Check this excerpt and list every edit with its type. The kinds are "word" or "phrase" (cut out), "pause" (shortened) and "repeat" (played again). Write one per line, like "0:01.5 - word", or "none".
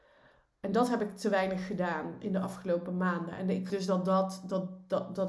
0:03.7 - word